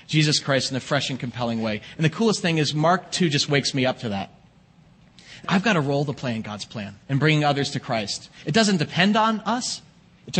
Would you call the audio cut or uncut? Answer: cut